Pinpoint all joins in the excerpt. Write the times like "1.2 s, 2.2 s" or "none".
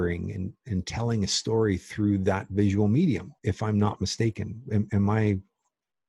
3.4 s